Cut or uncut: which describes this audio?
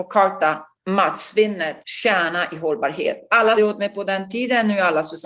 cut